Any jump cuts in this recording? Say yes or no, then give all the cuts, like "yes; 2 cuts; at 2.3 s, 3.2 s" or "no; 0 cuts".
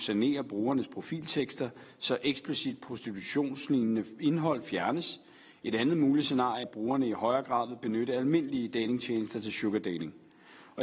yes; 1 cut; at 6.6 s